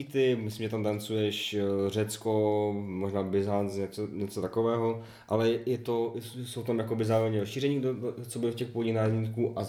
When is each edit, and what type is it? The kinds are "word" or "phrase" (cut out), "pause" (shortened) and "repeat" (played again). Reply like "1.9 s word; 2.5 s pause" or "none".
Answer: none